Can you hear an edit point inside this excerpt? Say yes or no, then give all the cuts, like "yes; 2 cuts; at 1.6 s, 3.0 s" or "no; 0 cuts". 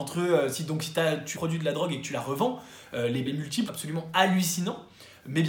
yes; 3 cuts; at 1.4 s, 3.3 s, 3.7 s